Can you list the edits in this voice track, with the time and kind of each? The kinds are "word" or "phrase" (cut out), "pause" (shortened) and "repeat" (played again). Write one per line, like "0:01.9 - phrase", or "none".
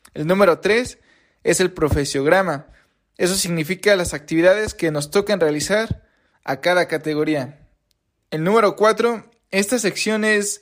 none